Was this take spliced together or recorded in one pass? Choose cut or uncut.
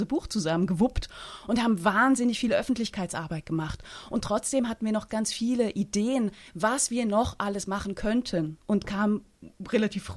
cut